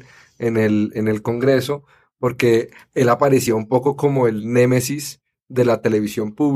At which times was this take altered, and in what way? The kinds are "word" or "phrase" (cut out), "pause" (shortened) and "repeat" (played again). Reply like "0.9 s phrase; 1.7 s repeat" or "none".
none